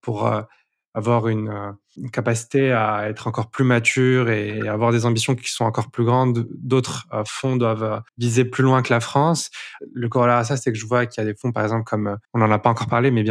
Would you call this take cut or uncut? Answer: cut